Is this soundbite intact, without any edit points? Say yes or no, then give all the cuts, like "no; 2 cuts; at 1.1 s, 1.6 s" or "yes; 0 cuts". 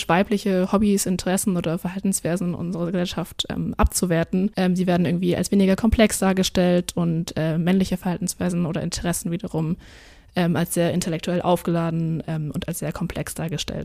yes; 0 cuts